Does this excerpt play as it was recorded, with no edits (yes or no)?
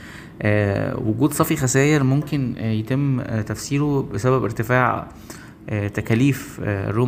yes